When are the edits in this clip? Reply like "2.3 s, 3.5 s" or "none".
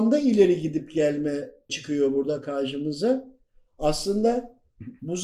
1.7 s